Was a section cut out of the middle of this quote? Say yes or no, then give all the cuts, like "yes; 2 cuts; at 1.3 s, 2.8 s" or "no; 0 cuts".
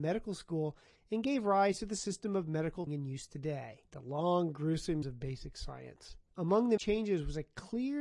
yes; 5 cuts; at 2.9 s, 3.9 s, 5.0 s, 6.3 s, 6.8 s